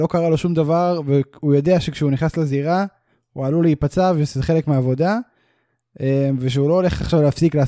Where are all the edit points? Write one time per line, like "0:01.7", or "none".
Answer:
none